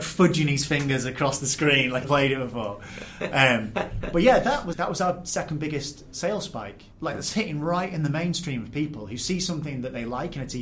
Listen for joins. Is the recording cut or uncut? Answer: cut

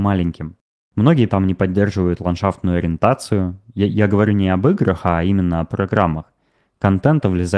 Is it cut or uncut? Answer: cut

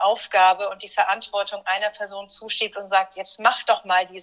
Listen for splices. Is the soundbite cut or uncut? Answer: uncut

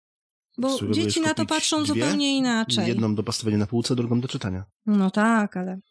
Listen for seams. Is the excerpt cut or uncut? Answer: cut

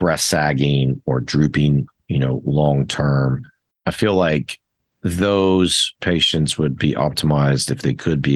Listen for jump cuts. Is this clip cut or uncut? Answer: uncut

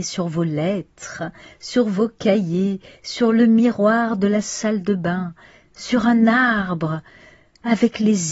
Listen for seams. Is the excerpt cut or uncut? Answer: uncut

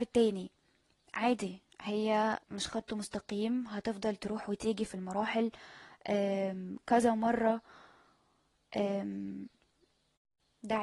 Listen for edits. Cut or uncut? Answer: cut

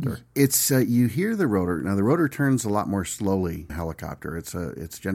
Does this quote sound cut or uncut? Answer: cut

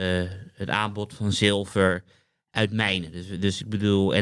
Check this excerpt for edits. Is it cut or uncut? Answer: uncut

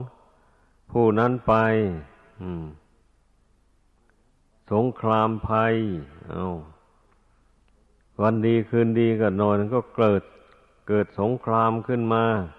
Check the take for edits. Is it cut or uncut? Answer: uncut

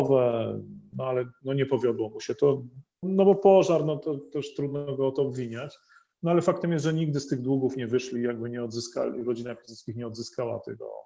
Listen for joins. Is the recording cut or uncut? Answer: uncut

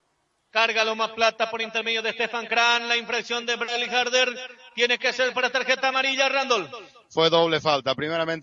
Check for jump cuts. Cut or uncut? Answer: uncut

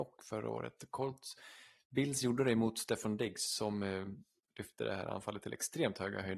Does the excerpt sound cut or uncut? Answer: uncut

